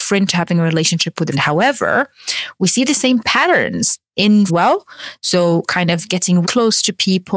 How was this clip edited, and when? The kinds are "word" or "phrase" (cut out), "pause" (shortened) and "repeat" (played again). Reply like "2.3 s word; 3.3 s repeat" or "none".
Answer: 1.3 s word; 4.5 s phrase; 6.4 s word

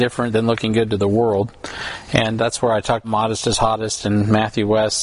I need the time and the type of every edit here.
2.4 s word; 3.0 s word

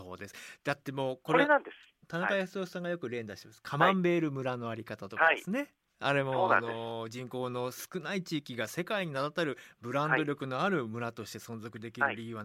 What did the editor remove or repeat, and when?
2.0 s pause

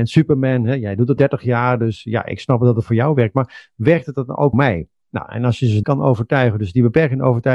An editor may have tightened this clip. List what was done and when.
1.2 s word; 4.5 s word; 5.8 s word

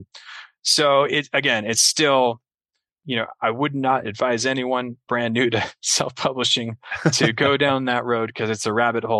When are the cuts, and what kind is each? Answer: none

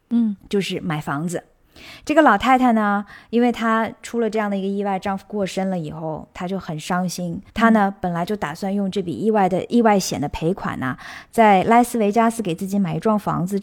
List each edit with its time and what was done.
7.5 s pause

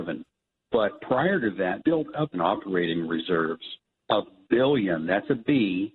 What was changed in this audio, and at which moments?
1.8 s word; 2.3 s phrase

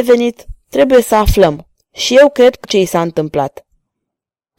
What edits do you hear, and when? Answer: 1.7 s pause; 2.6 s word

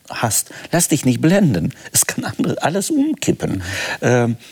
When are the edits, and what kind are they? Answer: none

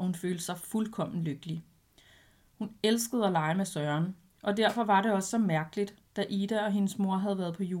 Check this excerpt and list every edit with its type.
none

